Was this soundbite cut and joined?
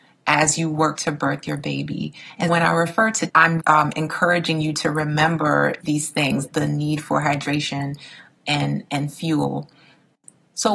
yes; 6 cuts; at 1.0 s, 2.5 s, 3.3 s, 3.6 s, 5.8 s, 6.5 s

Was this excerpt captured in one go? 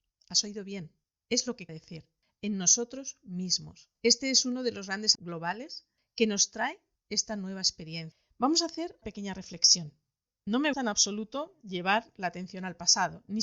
no; 5 cuts; at 1.7 s, 3.9 s, 5.1 s, 9.0 s, 10.7 s

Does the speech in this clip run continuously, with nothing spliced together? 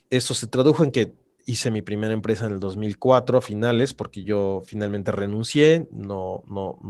yes; 0 cuts

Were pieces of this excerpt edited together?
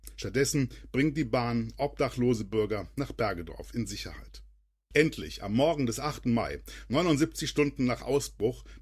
no; 0 cuts

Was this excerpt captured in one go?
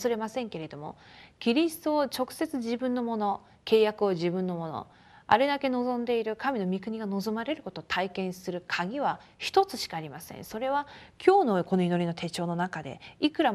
yes; 0 cuts

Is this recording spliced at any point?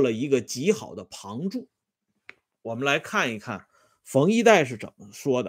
no; 0 cuts

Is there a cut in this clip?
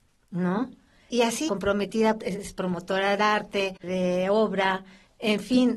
yes; 4 cuts; at 1.5 s, 2.2 s, 3.2 s, 3.8 s

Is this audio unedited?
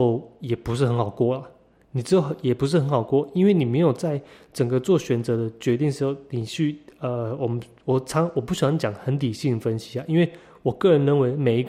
yes; 0 cuts

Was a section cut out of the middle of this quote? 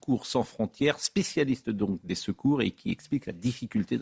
no; 0 cuts

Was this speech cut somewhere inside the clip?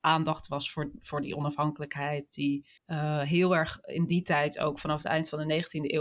yes; 1 cut; at 2.8 s

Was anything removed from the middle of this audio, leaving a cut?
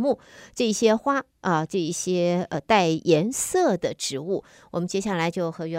no; 0 cuts

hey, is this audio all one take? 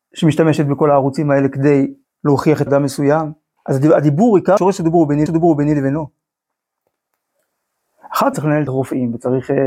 no; 7 cuts; at 2.0 s, 2.7 s, 3.6 s, 4.6 s, 5.3 s, 8.3 s, 8.7 s

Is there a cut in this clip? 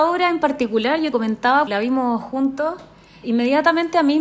yes; 3 cuts; at 1.1 s, 1.7 s, 3.2 s

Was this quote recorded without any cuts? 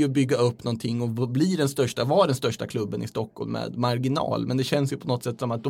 yes; 0 cuts

